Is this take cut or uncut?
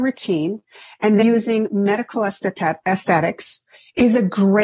cut